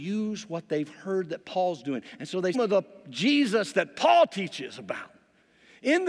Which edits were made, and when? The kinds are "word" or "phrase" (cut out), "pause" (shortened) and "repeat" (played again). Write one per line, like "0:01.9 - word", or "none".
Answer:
0:02.5 - phrase